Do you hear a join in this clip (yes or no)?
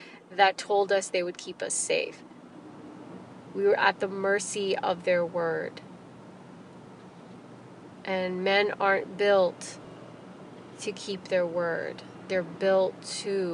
no